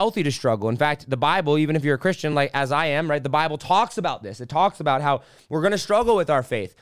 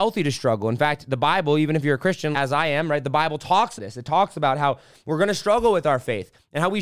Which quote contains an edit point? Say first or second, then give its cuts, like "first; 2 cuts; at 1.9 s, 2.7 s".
second; 2 cuts; at 2.3 s, 3.8 s